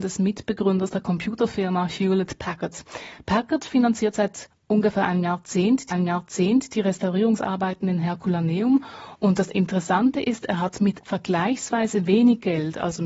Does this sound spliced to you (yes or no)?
yes